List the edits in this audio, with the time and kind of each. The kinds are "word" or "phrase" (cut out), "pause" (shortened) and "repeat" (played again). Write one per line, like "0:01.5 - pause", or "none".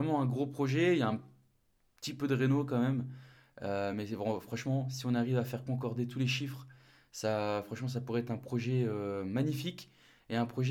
none